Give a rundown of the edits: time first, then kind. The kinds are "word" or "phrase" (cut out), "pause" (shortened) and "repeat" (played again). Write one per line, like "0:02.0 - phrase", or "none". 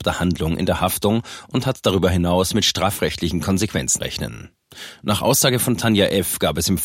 0:04.0 - word

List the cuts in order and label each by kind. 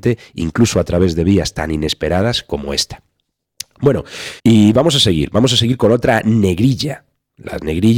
0:04.4 - pause

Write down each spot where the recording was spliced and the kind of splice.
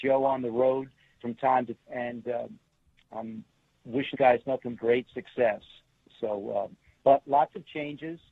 0:01.2 - word
0:01.8 - word
0:04.1 - word
0:04.8 - word

